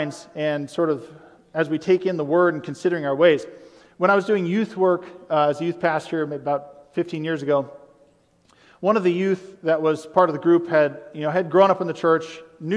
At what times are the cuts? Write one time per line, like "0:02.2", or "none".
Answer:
none